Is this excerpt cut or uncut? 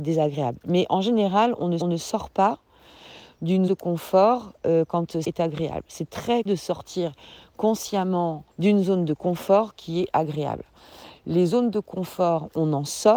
cut